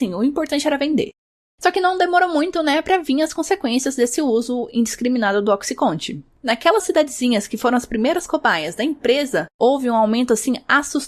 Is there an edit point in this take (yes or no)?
no